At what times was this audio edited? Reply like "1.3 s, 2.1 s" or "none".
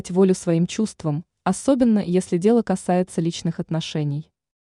none